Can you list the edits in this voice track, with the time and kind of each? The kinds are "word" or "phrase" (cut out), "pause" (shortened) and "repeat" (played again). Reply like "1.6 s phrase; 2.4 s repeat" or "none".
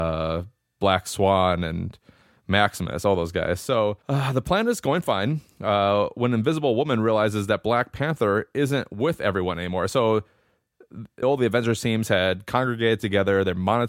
4.0 s pause; 11.2 s word